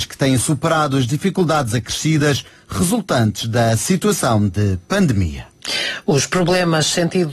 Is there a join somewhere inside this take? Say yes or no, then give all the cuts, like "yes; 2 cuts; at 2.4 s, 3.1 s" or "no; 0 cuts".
no; 0 cuts